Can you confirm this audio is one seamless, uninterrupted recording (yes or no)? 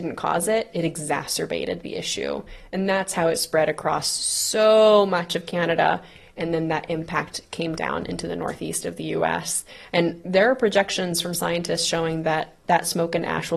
yes